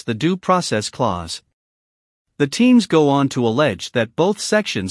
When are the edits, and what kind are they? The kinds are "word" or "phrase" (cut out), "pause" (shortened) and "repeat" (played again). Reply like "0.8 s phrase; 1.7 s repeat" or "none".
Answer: none